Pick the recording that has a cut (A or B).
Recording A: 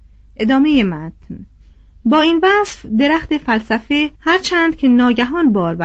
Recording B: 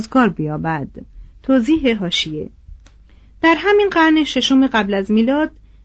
A